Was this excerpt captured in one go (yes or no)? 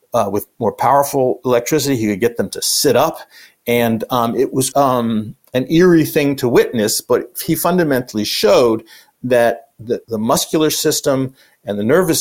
no